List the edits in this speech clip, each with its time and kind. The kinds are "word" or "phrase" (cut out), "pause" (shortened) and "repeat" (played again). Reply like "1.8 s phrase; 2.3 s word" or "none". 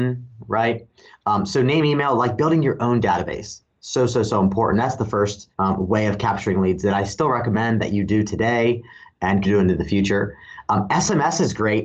5.5 s pause; 9.4 s phrase